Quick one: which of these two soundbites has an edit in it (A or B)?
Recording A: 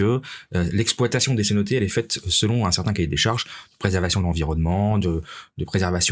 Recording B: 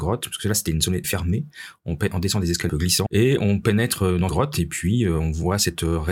B